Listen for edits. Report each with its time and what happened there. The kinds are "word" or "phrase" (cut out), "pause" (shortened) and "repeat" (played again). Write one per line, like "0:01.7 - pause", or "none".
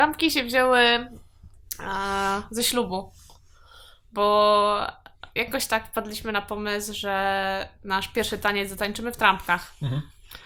none